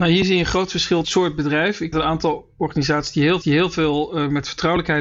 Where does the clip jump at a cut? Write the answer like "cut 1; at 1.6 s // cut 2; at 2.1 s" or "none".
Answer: cut 1; at 1.0 s // cut 2; at 1.9 s // cut 3; at 3.4 s